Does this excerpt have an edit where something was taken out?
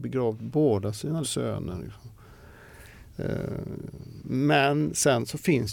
yes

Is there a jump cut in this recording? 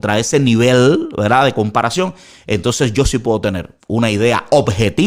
no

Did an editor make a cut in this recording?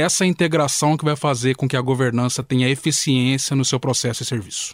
no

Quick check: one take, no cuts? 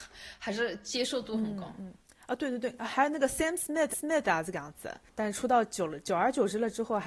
no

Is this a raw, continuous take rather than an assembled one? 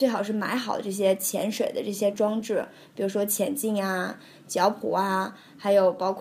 yes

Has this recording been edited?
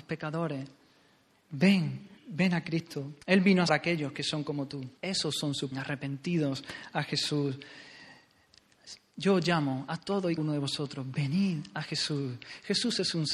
yes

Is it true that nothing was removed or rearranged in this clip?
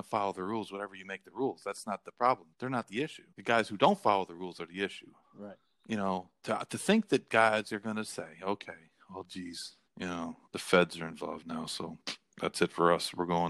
no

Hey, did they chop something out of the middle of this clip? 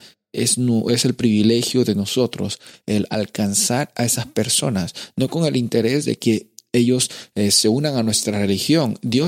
no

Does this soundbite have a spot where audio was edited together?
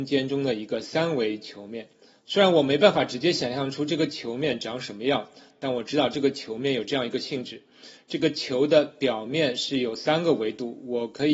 yes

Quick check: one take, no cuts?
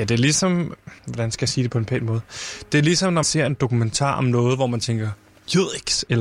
no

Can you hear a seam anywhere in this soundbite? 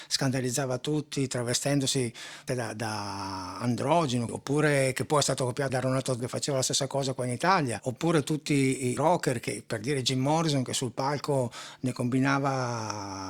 yes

